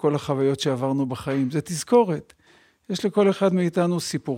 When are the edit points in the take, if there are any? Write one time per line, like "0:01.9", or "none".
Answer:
none